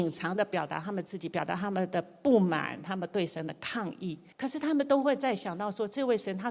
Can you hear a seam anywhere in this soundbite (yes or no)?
yes